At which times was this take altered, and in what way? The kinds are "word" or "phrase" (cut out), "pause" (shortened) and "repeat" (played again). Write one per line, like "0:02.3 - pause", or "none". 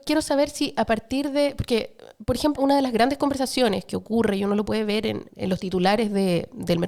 0:02.6 - word
0:05.3 - word